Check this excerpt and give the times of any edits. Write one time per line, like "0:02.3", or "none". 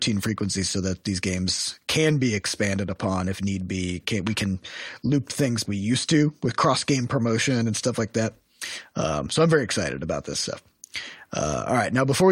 0:05.6